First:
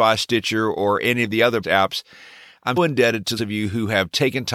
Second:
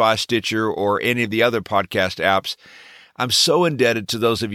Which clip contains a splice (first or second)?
first